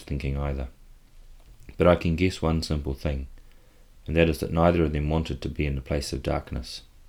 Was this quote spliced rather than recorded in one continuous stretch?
no; 0 cuts

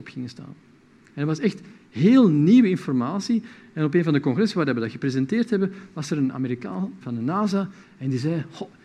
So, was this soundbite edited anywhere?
yes; 1 cut; at 7.0 s

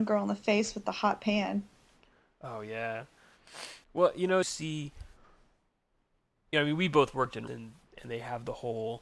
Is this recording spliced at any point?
yes; 3 cuts; at 3.8 s, 4.4 s, 7.5 s

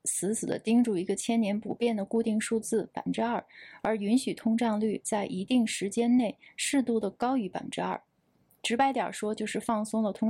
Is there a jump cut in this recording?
no; 0 cuts

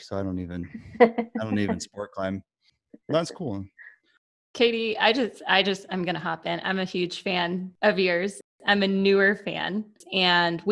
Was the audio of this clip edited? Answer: no; 0 cuts

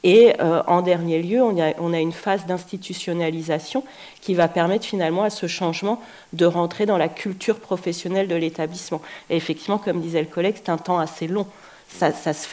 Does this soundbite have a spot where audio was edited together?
no; 0 cuts

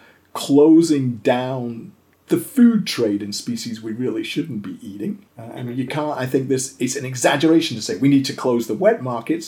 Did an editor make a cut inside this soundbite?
yes; 2 cuts; at 2.1 s, 5.3 s

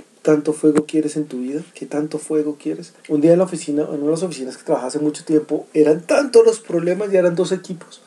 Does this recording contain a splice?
yes; 3 cuts; at 1.7 s, 3.0 s, 5.7 s

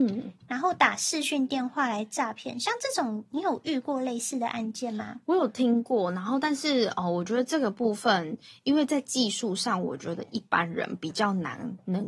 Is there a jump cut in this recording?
no; 0 cuts

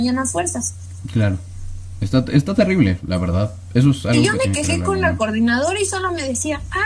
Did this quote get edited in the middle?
no; 0 cuts

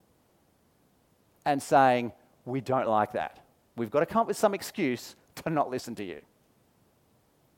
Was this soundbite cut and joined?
no; 0 cuts

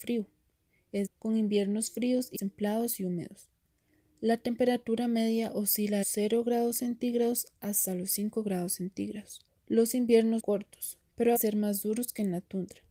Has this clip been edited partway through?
yes; 6 cuts; at 1.1 s, 2.3 s, 6.0 s, 9.5 s, 10.4 s, 11.4 s

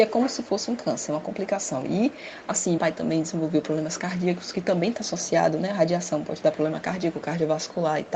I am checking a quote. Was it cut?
yes; 1 cut; at 2.8 s

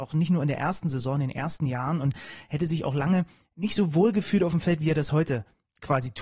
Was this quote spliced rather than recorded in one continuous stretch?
no; 0 cuts

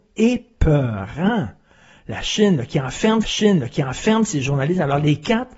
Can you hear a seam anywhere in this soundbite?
yes; 1 cut; at 3.2 s

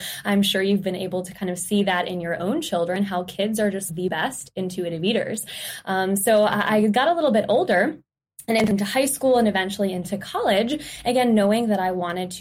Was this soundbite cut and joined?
yes; 1 cut; at 3.9 s

